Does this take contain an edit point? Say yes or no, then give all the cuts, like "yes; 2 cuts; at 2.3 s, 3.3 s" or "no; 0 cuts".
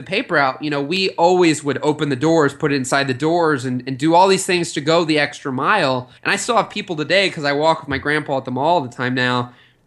yes; 1 cut; at 6.2 s